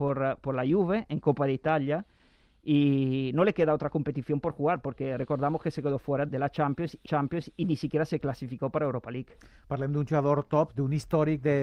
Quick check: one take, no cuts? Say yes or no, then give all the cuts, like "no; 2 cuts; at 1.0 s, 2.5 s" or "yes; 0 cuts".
no; 2 cuts; at 6.3 s, 7.1 s